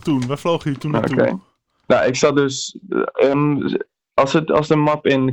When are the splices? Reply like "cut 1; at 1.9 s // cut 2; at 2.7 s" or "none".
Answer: none